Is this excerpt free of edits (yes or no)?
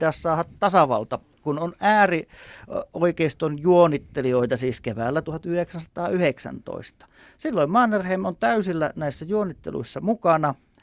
yes